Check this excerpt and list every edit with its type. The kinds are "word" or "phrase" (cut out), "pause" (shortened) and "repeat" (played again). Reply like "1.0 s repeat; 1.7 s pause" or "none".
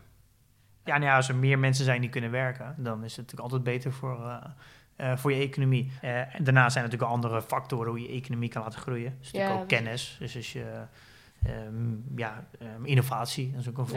none